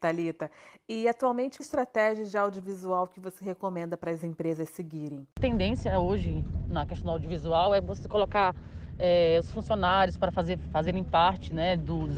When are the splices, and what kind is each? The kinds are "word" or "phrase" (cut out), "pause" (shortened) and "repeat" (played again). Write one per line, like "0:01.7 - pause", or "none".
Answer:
0:01.6 - phrase
0:05.3 - pause